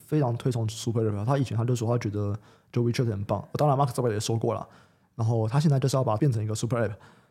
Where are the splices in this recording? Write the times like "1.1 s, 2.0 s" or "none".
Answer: 6.2 s